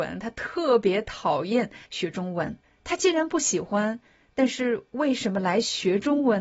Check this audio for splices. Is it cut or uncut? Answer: cut